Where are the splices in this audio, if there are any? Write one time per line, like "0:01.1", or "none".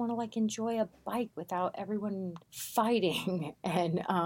0:01.3
0:02.4